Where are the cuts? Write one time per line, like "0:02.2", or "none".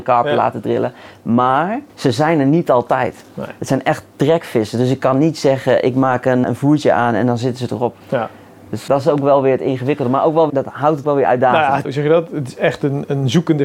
0:01.9
0:06.4
0:08.0
0:08.9
0:10.5
0:11.0
0:11.8